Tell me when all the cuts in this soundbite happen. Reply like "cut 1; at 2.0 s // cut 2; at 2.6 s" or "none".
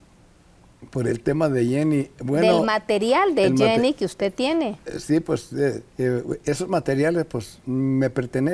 cut 1; at 5.9 s